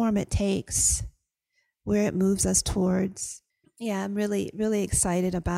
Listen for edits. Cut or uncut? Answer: cut